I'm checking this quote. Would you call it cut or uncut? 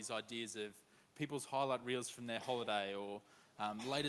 uncut